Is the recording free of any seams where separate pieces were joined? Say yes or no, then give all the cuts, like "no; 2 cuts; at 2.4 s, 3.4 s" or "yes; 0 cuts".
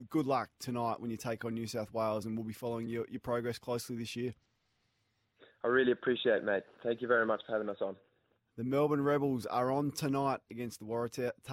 yes; 0 cuts